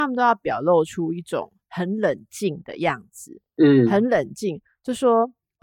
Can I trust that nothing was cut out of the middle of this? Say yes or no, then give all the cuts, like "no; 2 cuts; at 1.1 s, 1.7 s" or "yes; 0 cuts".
yes; 0 cuts